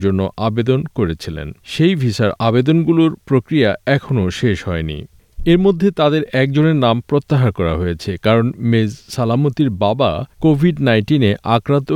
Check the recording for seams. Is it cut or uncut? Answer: cut